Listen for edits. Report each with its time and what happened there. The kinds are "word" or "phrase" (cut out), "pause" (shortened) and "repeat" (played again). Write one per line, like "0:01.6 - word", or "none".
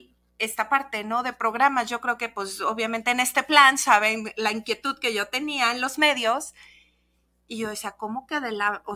none